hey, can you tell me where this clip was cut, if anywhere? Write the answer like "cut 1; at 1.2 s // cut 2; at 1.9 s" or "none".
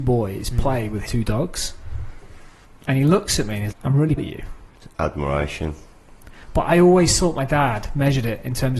cut 1; at 1.1 s // cut 2; at 2.6 s // cut 3; at 3.7 s // cut 4; at 4.2 s // cut 5; at 4.7 s